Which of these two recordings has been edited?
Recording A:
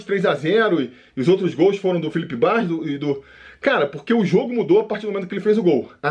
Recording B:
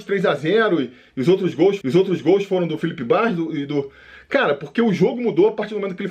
B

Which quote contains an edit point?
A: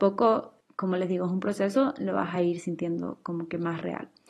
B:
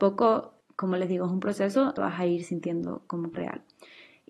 B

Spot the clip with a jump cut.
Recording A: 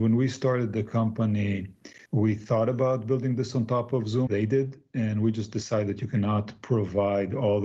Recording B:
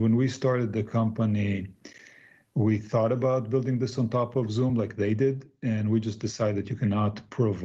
A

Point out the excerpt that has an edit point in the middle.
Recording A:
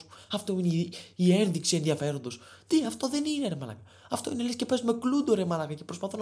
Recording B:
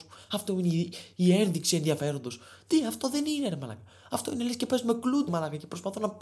B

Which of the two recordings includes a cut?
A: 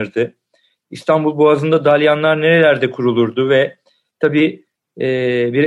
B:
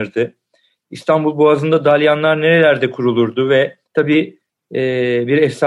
B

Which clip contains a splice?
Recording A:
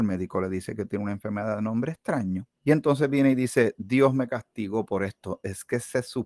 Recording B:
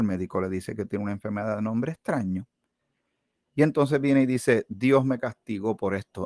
A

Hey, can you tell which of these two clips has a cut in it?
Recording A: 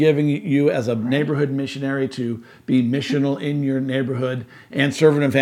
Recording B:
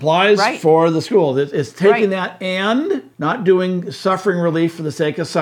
B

